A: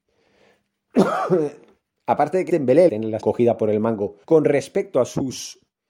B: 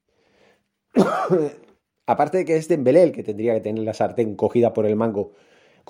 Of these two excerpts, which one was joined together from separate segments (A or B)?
A